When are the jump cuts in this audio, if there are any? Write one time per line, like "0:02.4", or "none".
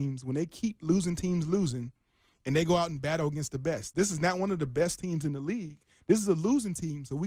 none